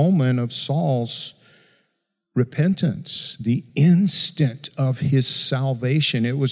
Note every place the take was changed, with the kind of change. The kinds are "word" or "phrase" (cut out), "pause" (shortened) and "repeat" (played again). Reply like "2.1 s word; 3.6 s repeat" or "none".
none